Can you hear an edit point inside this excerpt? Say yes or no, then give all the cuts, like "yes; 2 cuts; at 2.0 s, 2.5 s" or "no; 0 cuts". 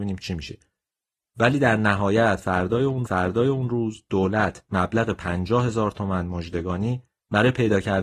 yes; 1 cut; at 3.0 s